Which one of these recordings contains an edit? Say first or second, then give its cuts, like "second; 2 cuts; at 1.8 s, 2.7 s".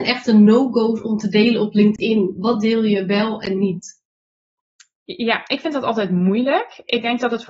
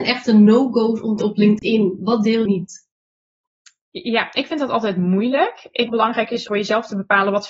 second; 4 cuts; at 1.2 s, 2.5 s, 5.9 s, 6.5 s